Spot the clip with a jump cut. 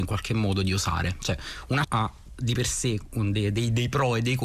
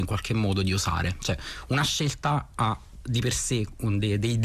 first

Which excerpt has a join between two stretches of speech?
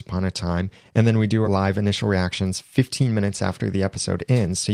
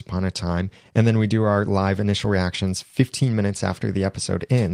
first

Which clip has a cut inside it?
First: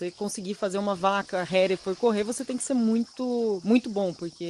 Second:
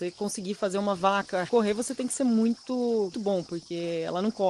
second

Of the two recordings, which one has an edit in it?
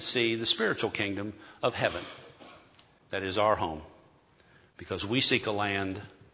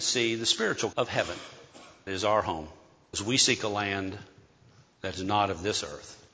second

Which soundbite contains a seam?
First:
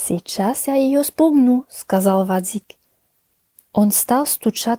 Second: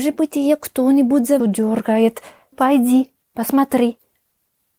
second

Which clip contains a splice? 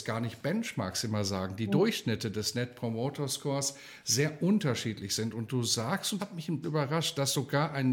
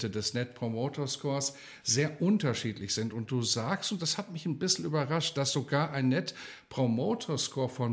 first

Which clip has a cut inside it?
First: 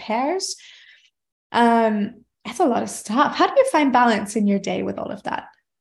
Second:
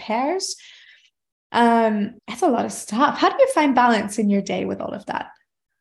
second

